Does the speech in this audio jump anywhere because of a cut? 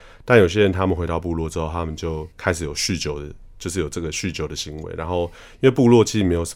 yes; 1 cut; at 2.3 s

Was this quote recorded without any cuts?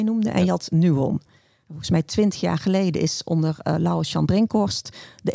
yes; 0 cuts

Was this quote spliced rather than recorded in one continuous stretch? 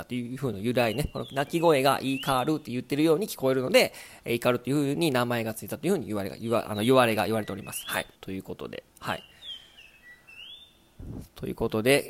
yes; 2 cuts; at 8.2 s, 8.9 s

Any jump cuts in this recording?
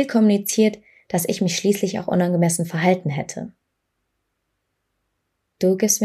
no; 0 cuts

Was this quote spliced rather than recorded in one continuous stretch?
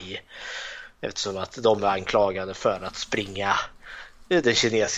no; 0 cuts

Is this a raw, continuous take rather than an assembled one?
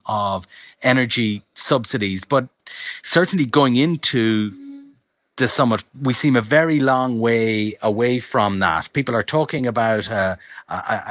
yes; 0 cuts

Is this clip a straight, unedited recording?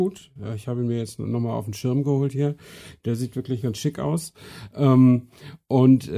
yes; 0 cuts

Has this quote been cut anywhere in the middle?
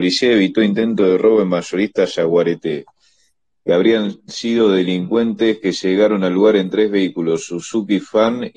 no; 0 cuts

